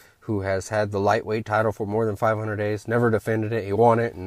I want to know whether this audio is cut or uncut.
uncut